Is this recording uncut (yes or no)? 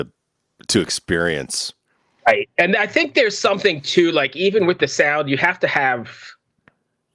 yes